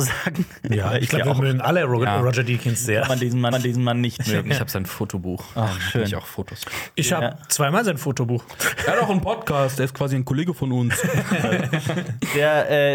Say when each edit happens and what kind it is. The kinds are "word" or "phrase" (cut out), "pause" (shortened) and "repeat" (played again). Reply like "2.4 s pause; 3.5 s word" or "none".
3.5 s repeat